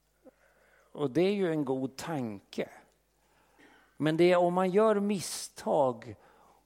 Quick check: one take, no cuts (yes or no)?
yes